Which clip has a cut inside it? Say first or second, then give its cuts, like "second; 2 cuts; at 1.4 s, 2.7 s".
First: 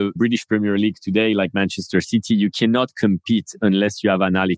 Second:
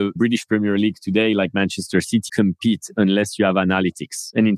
second; 1 cut; at 2.3 s